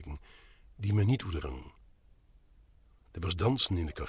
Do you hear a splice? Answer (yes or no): yes